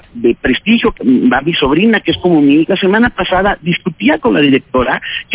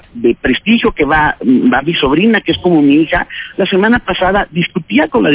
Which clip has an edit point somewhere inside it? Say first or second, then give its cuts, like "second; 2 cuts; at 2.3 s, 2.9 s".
first; 2 cuts; at 1.0 s, 2.6 s